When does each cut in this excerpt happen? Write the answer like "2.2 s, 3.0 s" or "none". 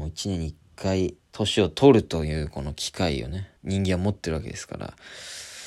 1.2 s, 3.6 s